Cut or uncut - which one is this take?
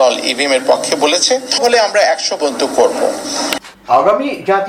cut